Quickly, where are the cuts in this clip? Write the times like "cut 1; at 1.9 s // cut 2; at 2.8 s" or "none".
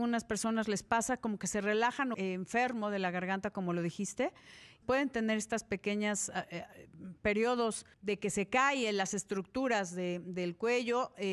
cut 1; at 2.1 s // cut 2; at 4.8 s // cut 3; at 7.9 s